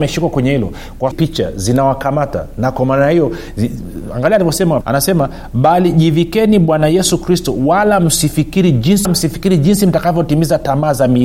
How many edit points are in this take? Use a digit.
3